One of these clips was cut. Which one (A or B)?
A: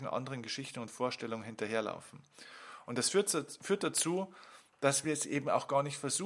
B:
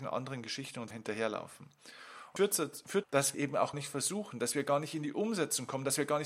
B